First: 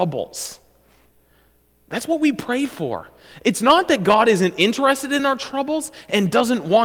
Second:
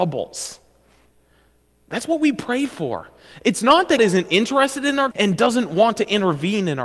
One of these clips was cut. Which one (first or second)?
second